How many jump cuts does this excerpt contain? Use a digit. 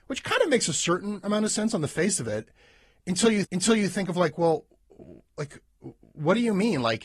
1